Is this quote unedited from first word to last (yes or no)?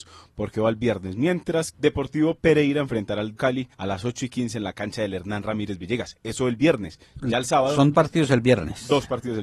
no